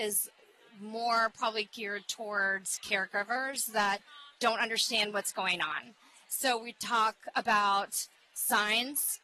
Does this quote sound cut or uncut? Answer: uncut